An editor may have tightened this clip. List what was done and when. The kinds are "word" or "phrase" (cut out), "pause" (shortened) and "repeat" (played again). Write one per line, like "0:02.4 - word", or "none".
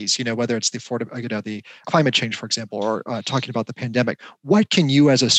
0:01.8 - word